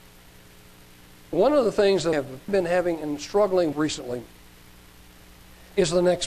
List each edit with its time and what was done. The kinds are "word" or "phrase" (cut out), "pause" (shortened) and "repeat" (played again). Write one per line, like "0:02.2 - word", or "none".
0:02.1 - word
0:02.5 - word
0:03.7 - word